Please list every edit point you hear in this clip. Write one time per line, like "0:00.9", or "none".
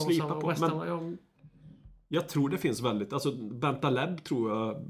none